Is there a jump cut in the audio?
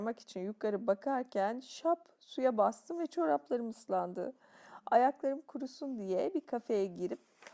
no; 0 cuts

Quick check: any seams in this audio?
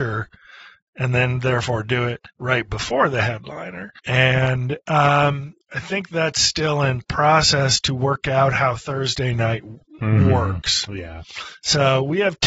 yes; 3 cuts; at 2.3 s, 4.0 s, 5.6 s

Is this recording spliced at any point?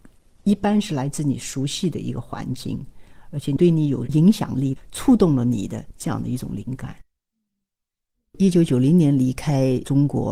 no; 0 cuts

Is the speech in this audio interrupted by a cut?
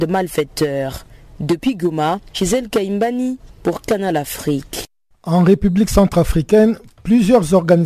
no; 0 cuts

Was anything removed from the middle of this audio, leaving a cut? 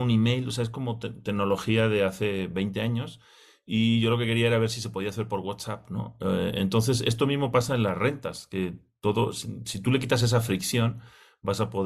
no; 0 cuts

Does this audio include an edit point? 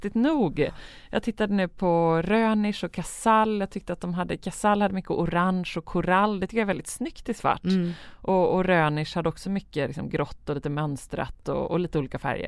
no; 0 cuts

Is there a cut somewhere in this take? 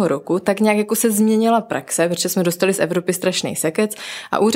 no; 0 cuts

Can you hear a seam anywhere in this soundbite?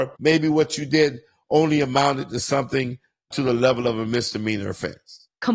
no; 0 cuts

